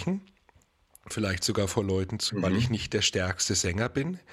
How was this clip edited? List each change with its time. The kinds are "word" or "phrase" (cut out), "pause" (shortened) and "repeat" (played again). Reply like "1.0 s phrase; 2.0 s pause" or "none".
1.1 s word; 2.3 s word